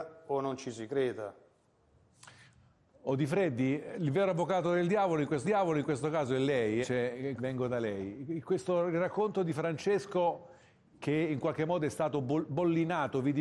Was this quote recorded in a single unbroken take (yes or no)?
no